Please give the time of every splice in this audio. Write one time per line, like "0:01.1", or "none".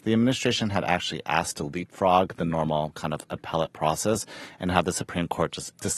none